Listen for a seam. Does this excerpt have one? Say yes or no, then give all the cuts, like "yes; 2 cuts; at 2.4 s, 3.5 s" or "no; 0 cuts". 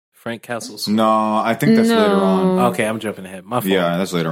no; 0 cuts